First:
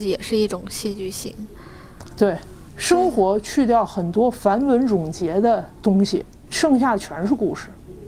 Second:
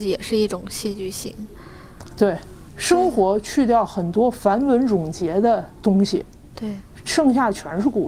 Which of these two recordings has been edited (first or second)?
first